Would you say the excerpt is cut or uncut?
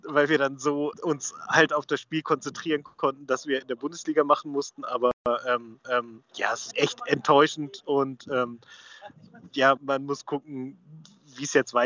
cut